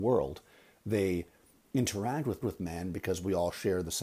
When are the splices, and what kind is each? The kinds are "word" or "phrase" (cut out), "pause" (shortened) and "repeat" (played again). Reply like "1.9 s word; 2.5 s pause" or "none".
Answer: 2.4 s repeat